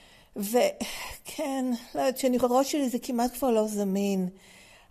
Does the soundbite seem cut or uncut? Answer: cut